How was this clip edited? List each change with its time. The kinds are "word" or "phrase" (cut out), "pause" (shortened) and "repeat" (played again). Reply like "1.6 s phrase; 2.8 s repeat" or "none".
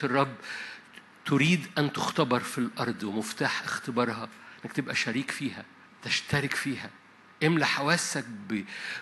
5.9 s pause